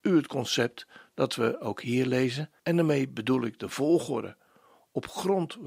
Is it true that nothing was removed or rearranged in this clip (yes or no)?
no